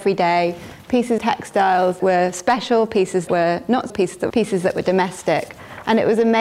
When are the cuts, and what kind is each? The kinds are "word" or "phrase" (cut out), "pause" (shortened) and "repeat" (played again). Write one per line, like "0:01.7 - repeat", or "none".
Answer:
0:01.2 - word
0:02.0 - word
0:03.3 - word
0:03.9 - word
0:04.3 - word